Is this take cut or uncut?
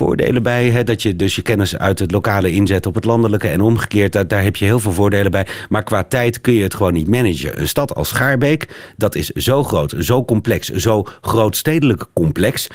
uncut